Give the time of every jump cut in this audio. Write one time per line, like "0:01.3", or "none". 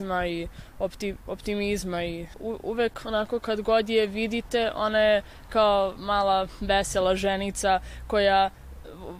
0:02.3